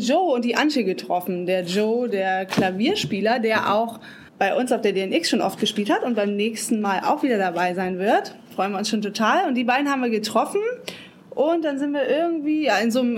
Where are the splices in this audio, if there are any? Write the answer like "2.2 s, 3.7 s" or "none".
4.3 s